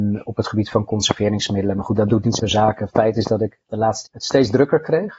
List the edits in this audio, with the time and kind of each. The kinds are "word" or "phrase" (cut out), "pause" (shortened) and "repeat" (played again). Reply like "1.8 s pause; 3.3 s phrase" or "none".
2.4 s word; 3.6 s pause; 4.1 s word